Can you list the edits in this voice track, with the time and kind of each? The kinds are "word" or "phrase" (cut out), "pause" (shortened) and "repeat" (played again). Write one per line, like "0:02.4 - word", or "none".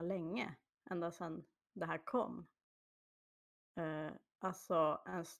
none

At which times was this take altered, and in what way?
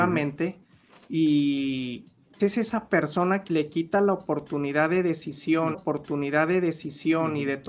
0:02.4 - word
0:03.5 - phrase
0:05.7 - repeat

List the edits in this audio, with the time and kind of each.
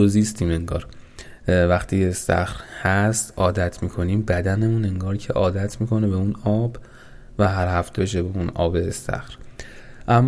0:08.0 - phrase

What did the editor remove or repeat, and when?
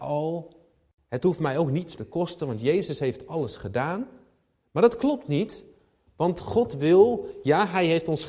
0:02.0 - word

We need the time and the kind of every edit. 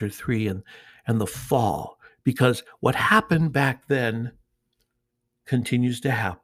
none

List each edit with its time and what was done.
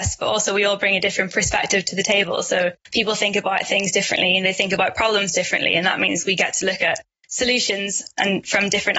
0:02.8 - pause

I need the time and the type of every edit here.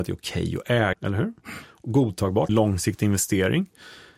0:00.9 - word
0:02.5 - word

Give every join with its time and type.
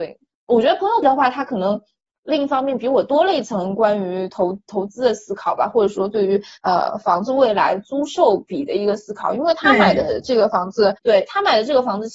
0:01.0 - word
0:06.6 - pause
0:11.0 - pause

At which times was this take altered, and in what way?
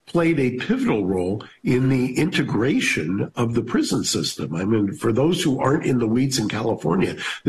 none

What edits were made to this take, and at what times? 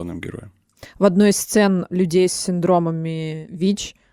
none

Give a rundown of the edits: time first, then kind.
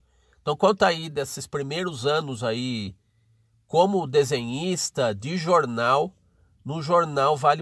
none

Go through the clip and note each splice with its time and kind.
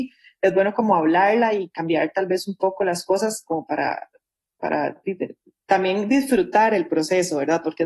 none

